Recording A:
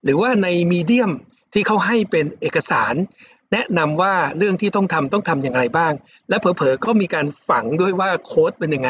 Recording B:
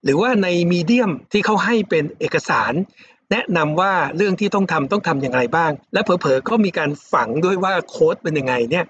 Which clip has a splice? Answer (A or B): B